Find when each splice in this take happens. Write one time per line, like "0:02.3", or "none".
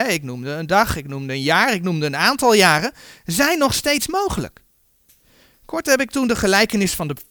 none